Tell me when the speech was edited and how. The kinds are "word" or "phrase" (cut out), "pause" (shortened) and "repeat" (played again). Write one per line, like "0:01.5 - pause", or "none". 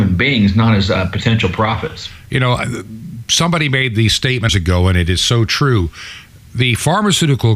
0:04.5 - phrase

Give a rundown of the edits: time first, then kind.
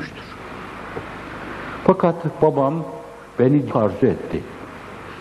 0:03.7 - phrase

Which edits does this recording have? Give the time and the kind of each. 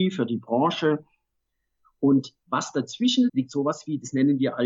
0:02.4 - pause
0:03.3 - word

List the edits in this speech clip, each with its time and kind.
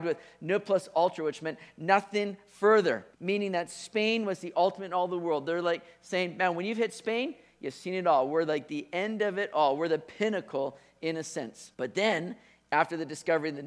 0:03.1 - pause
0:11.7 - pause

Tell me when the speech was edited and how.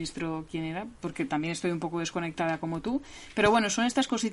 none

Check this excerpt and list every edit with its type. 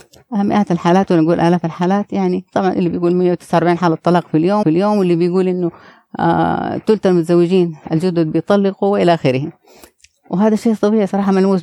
0:04.6 - repeat

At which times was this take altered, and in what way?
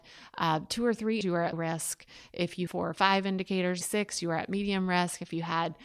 0:01.2 - word
0:01.5 - word
0:02.7 - word
0:03.8 - word

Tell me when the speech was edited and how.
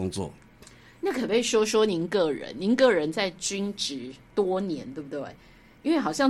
none

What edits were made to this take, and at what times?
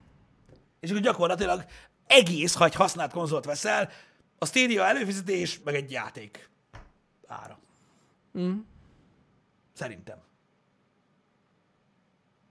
0:02.1 - word
0:05.6 - word

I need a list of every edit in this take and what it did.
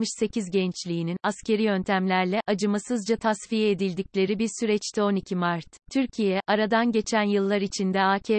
0:05.8 - pause

